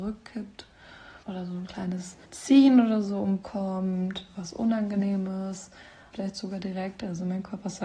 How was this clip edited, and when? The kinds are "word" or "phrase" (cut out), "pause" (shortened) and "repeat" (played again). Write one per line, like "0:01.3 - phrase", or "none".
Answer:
0:01.2 - pause
0:02.2 - pause
0:03.4 - word
0:06.1 - word